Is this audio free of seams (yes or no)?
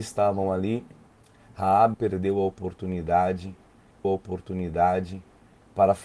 no